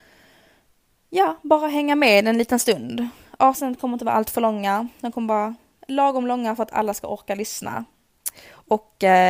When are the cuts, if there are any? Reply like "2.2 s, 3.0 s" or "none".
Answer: none